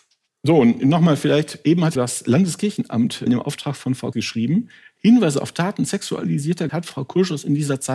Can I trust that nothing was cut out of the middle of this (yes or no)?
no